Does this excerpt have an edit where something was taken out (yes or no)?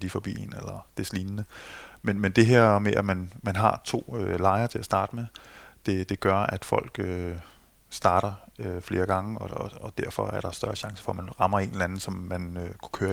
no